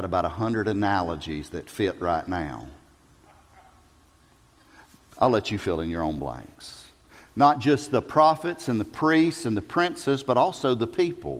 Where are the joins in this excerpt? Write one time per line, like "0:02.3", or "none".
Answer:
none